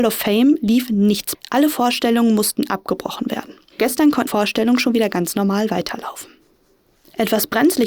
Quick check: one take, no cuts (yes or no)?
no